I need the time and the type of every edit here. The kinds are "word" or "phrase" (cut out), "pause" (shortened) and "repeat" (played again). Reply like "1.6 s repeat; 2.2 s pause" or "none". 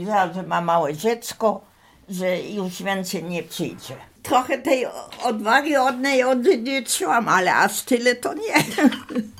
4.1 s pause